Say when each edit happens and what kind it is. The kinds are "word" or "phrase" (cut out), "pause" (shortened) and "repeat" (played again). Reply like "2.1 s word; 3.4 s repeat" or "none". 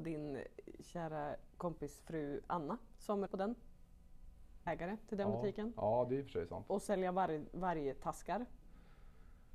1.5 s pause; 3.3 s word; 4.7 s phrase